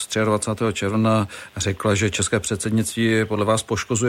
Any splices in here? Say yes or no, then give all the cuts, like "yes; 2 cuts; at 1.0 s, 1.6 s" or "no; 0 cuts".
no; 0 cuts